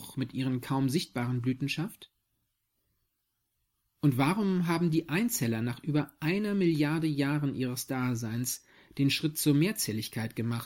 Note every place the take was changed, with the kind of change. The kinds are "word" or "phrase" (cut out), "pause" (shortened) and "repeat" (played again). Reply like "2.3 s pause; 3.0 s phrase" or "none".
none